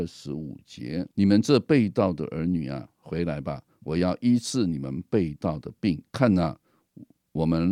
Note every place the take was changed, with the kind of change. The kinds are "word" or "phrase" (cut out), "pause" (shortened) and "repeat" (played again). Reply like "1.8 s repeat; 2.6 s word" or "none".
1.1 s pause; 6.1 s pause